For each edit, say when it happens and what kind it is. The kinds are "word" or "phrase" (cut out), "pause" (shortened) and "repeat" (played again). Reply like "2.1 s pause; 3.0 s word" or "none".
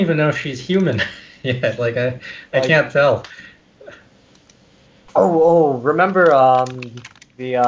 none